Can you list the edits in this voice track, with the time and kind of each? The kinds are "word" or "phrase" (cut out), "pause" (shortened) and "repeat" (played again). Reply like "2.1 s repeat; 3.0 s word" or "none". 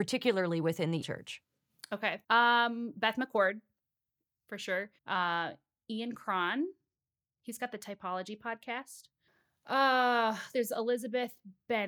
1.0 s word; 2.2 s pause; 5.0 s pause; 9.3 s pause